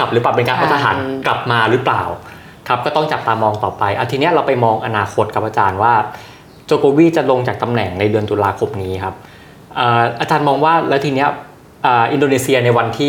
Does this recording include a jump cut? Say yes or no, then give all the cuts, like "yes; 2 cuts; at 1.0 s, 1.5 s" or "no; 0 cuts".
no; 0 cuts